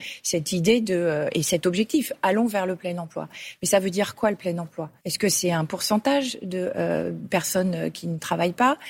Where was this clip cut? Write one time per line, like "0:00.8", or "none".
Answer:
0:05.0